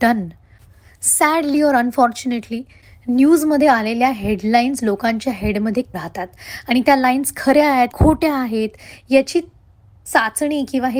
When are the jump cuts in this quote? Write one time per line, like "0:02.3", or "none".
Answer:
0:05.9
0:07.9